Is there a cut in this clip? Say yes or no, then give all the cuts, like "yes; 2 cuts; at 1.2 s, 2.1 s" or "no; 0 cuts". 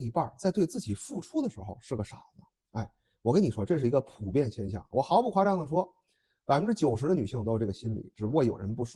no; 0 cuts